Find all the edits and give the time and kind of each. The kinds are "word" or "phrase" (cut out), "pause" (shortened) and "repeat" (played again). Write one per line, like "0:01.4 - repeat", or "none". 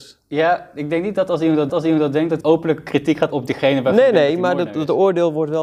0:01.7 - repeat
0:02.4 - word
0:03.3 - word